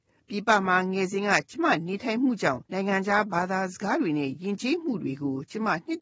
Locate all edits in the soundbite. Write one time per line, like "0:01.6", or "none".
0:02.7